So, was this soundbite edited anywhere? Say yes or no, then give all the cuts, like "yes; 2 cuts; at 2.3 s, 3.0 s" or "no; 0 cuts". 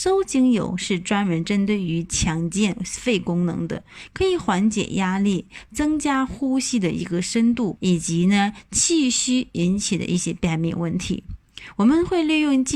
yes; 1 cut; at 7.8 s